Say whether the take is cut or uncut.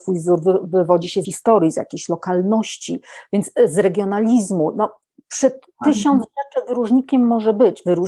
cut